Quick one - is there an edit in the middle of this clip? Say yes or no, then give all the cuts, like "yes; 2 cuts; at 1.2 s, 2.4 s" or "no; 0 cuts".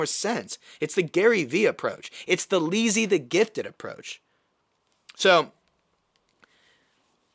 no; 0 cuts